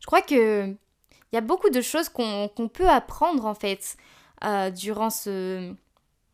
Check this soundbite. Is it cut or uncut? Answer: uncut